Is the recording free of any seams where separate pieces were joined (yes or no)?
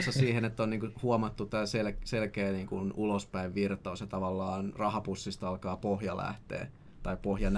yes